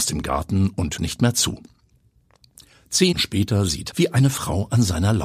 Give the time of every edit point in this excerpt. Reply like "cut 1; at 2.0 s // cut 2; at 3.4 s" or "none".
cut 1; at 1.0 s // cut 2; at 3.1 s // cut 3; at 3.9 s